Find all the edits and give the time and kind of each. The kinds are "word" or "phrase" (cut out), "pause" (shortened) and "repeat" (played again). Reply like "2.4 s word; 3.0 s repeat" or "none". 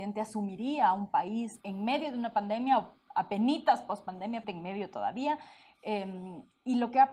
4.4 s word